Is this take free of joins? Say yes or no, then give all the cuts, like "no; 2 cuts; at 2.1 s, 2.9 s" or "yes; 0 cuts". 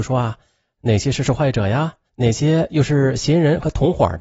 no; 1 cut; at 2.1 s